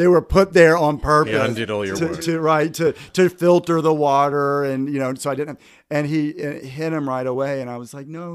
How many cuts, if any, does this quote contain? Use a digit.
0